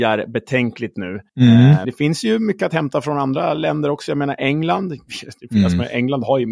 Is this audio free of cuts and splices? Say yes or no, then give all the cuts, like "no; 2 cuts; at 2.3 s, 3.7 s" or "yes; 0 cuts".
no; 3 cuts; at 0.9 s, 1.3 s, 1.8 s